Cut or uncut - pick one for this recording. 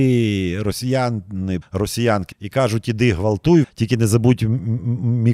cut